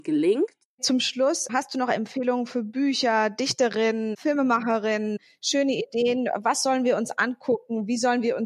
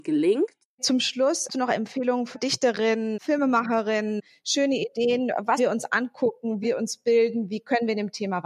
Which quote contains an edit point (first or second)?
second